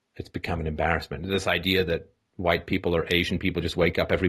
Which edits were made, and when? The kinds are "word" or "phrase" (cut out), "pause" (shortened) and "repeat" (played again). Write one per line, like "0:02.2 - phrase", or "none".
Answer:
none